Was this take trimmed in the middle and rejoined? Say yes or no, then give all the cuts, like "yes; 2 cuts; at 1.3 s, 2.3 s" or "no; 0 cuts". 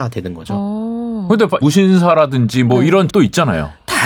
yes; 2 cuts; at 1.6 s, 3.1 s